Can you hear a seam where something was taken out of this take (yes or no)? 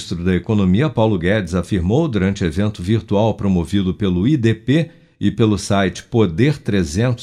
no